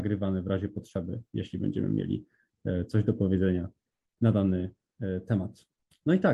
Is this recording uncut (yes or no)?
yes